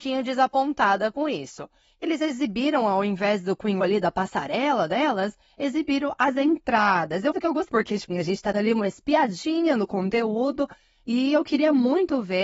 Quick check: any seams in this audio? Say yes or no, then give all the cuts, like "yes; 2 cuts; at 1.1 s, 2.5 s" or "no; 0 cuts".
yes; 6 cuts; at 2.0 s, 3.8 s, 7.3 s, 7.7 s, 8.1 s, 8.5 s